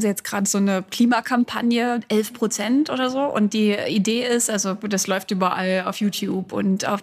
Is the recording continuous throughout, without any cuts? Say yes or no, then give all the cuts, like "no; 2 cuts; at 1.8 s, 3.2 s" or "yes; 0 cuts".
yes; 0 cuts